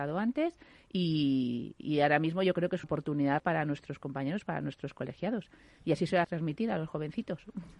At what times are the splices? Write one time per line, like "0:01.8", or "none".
0:02.8
0:03.4
0:06.2